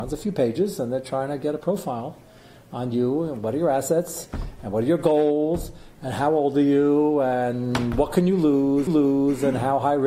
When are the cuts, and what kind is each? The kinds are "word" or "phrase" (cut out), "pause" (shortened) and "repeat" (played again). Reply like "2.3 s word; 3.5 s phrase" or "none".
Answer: 8.9 s repeat